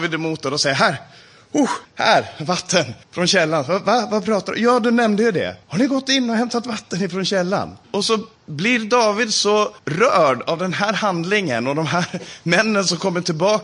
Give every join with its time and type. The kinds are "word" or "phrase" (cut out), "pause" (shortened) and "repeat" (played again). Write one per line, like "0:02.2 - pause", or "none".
0:01.8 - pause
0:03.0 - pause
0:05.6 - pause
0:07.8 - pause
0:08.4 - pause
0:09.8 - pause